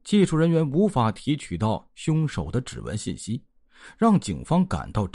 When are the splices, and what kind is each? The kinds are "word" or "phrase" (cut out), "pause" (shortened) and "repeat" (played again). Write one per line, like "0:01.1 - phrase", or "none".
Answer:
none